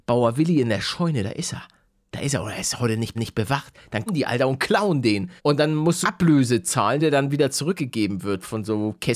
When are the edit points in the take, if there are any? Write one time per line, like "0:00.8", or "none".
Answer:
0:03.1
0:04.1
0:05.4
0:06.0
0:07.0